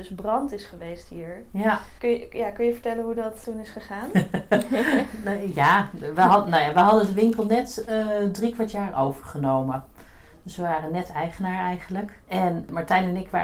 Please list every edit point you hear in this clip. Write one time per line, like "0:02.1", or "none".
none